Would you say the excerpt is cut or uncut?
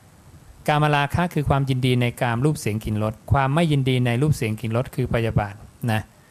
cut